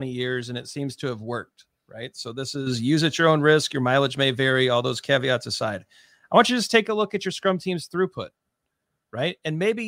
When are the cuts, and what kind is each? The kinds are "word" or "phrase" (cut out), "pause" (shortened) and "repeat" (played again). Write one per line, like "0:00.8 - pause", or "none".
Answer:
none

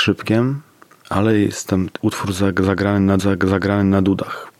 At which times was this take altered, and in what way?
0:02.0 - word
0:03.2 - repeat

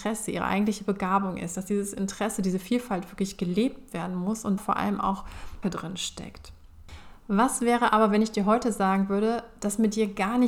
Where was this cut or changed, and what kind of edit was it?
0:04.6 - phrase
0:05.6 - phrase

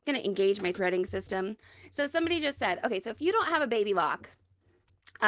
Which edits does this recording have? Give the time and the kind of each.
none

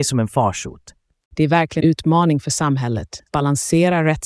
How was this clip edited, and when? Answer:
0:01.8 - word
0:03.3 - word

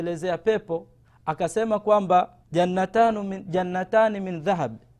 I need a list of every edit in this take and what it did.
0:01.0 - pause
0:02.4 - pause

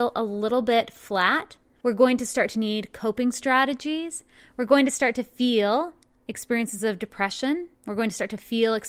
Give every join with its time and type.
none

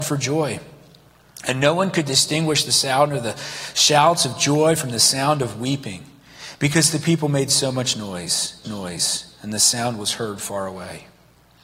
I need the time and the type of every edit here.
0:08.6 - repeat

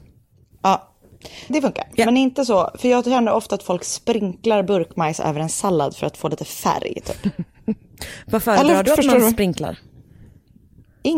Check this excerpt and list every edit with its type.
0:01.5 - word

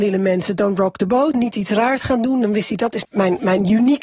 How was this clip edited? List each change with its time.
0:01.3 - word
0:03.0 - word

